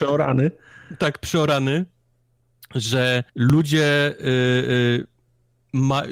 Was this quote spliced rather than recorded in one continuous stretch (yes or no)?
yes